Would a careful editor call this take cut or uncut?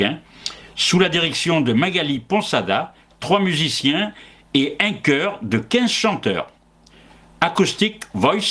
uncut